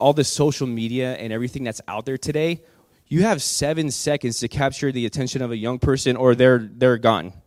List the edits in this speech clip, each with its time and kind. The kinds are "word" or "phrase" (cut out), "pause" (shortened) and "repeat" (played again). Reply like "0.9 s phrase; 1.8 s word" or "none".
none